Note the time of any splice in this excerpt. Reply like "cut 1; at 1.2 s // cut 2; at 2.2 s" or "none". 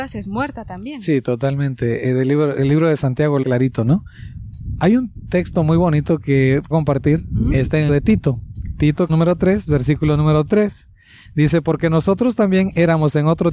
cut 1; at 3.4 s // cut 2; at 6.7 s // cut 3; at 7.9 s // cut 4; at 9.1 s